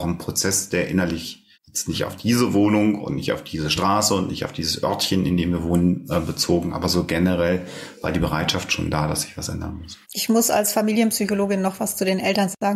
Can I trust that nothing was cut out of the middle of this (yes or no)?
no